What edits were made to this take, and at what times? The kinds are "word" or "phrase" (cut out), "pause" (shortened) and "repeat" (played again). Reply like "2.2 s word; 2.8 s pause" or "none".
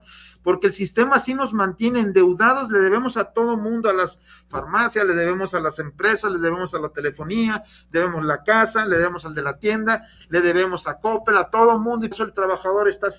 12.1 s word